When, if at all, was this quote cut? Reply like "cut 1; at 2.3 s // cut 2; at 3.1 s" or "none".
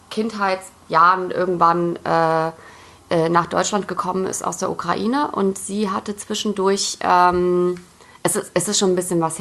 none